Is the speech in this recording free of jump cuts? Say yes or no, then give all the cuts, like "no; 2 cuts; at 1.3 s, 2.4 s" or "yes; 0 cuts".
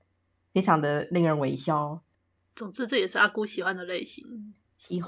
yes; 0 cuts